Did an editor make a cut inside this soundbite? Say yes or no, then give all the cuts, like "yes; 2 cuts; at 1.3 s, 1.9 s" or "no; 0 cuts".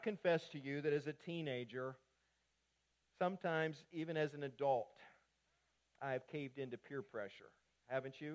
no; 0 cuts